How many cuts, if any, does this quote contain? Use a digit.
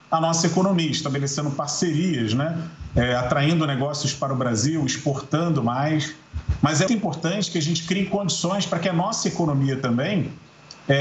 1